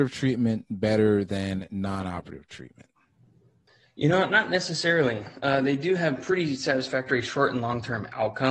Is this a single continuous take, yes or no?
yes